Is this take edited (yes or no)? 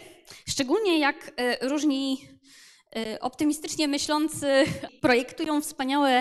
yes